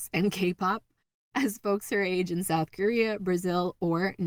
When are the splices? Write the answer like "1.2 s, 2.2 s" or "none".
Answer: none